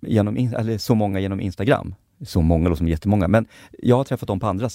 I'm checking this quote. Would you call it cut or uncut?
uncut